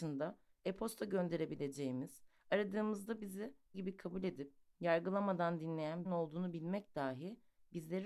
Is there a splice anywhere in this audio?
yes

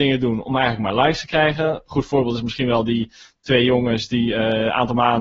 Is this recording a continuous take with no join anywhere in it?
yes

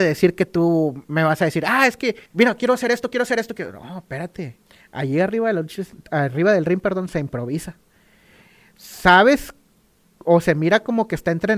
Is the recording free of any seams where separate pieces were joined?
no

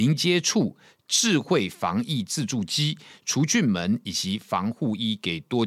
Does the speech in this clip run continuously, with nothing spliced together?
yes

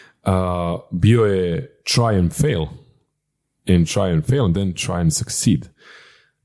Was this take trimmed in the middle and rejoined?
no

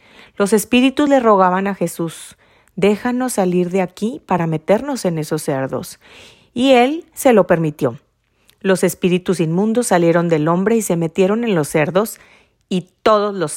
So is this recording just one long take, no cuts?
yes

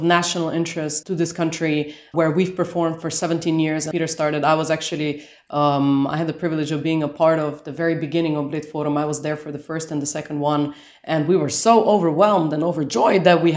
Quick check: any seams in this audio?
yes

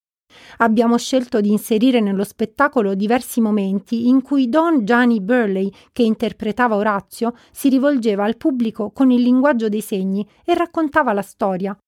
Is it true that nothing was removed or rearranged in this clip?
yes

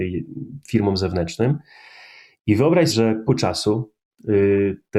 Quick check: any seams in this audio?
yes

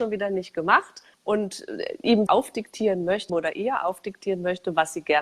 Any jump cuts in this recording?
yes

